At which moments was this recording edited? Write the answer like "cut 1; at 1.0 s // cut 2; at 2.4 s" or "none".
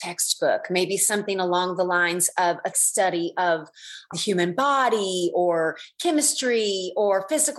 cut 1; at 2.7 s // cut 2; at 4.1 s